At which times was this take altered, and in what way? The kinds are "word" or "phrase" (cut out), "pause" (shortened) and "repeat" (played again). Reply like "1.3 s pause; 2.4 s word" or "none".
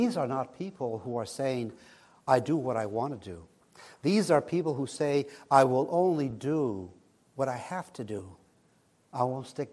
none